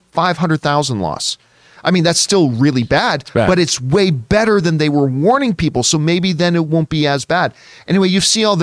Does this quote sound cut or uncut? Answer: uncut